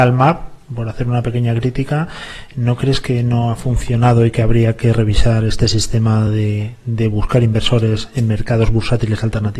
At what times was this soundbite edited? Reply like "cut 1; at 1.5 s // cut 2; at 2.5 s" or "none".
none